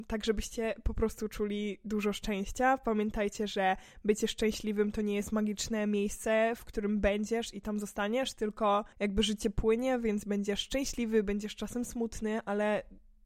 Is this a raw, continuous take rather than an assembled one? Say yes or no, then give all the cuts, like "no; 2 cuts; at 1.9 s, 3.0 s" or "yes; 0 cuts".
no; 1 cut; at 8.9 s